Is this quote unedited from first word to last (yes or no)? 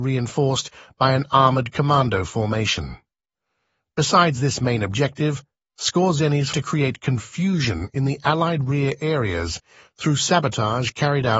no